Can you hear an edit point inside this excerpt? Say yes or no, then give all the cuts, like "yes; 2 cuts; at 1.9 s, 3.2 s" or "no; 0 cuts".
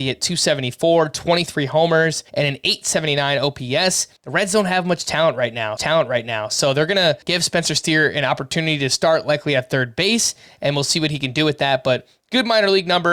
yes; 4 cuts; at 2.3 s, 4.2 s, 5.8 s, 7.2 s